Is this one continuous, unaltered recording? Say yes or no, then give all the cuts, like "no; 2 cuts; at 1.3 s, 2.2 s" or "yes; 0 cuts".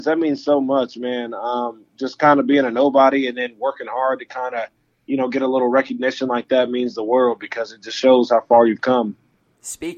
yes; 0 cuts